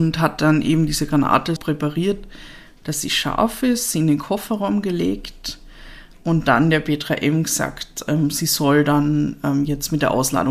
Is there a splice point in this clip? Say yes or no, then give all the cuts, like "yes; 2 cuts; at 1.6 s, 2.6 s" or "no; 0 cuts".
yes; 1 cut; at 1.6 s